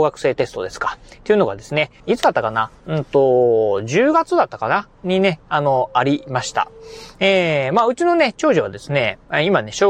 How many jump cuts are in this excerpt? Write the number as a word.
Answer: one